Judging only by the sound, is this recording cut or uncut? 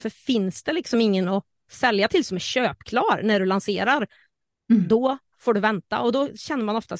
uncut